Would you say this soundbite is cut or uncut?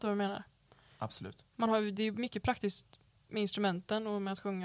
uncut